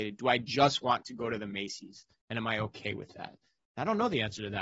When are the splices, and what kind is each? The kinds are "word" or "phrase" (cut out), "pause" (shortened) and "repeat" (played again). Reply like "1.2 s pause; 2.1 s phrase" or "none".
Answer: none